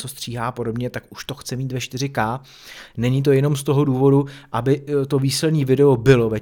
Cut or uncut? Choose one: uncut